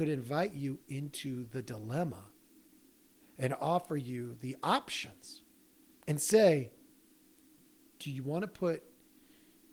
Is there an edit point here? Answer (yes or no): no